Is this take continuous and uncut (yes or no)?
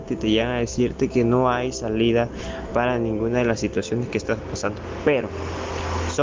yes